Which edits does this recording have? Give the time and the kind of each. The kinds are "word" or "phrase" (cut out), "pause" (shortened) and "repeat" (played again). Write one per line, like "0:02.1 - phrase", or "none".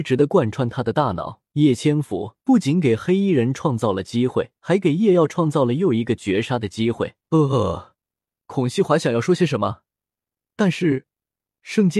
0:01.5 - pause
0:02.4 - pause
0:04.6 - pause
0:07.2 - pause